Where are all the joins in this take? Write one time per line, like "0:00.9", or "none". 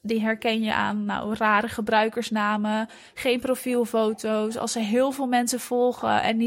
none